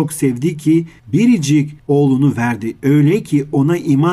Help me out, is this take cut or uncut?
uncut